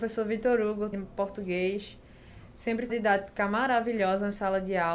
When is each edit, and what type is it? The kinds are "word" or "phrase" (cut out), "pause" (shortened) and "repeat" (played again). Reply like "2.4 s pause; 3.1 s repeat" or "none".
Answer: 0.9 s word; 2.9 s word